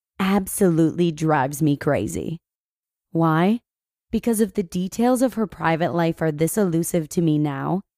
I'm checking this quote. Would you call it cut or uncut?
uncut